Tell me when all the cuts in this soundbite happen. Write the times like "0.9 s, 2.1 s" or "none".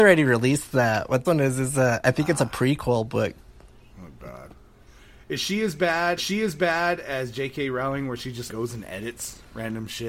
1.2 s, 3.7 s, 6.2 s, 8.5 s